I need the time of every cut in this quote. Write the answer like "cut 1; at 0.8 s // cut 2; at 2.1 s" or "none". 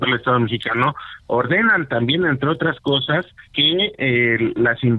cut 1; at 3.5 s